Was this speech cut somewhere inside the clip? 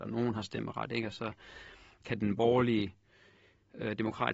no; 0 cuts

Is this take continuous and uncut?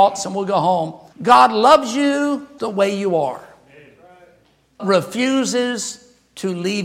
no; 3 cuts; at 1.1 s, 2.6 s, 4.8 s

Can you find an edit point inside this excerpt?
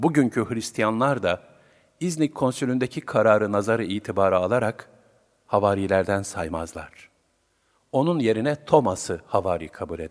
no; 0 cuts

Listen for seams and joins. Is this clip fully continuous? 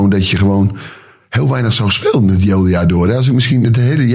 yes; 0 cuts

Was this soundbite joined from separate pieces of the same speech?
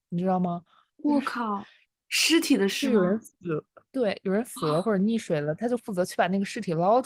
no; 0 cuts

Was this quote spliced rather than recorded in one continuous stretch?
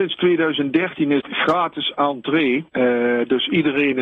yes; 2 cuts; at 1.2 s, 2.7 s

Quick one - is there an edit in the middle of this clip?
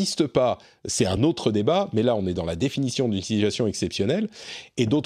no; 0 cuts

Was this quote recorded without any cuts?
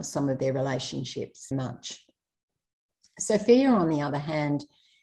no; 1 cut; at 1.5 s

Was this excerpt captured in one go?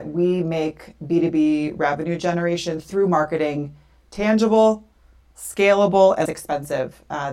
no; 1 cut; at 6.3 s

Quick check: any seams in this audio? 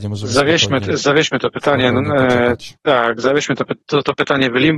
yes; 2 cuts; at 2.8 s, 3.8 s

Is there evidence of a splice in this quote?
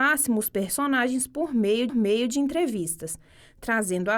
yes; 1 cut; at 1.9 s

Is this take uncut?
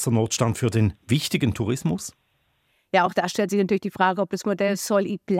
yes; 0 cuts

